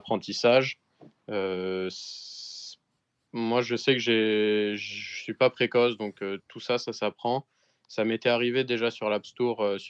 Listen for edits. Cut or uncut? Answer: uncut